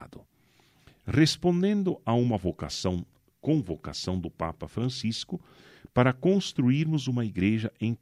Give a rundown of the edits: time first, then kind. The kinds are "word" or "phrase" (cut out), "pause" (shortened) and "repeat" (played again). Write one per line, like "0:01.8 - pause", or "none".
none